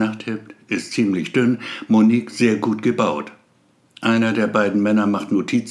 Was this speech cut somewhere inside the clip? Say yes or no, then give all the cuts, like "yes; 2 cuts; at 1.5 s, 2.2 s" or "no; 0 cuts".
no; 0 cuts